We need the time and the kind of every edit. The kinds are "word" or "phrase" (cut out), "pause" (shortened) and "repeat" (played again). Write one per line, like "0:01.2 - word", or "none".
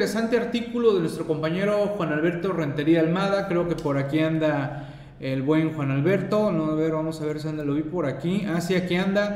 none